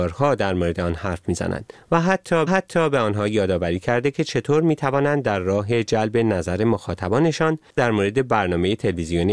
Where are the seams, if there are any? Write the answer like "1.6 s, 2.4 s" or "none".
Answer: 2.5 s